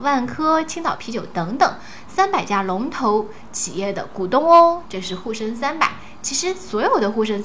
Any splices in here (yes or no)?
no